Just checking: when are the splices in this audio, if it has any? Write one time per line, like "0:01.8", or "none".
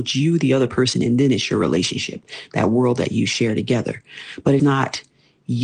0:04.6